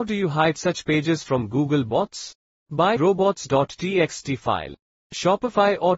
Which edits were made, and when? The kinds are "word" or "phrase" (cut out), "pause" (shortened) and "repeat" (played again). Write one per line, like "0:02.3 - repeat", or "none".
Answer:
0:03.0 - word